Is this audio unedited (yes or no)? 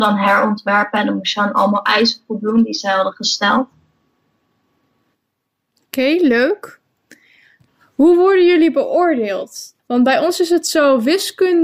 no